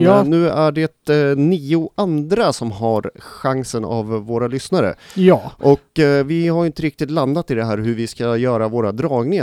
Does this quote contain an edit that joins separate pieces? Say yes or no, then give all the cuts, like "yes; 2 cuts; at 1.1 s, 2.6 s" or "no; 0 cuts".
no; 0 cuts